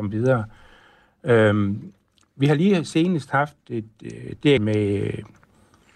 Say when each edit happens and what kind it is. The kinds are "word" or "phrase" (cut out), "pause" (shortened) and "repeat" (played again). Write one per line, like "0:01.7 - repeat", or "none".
0:04.6 - word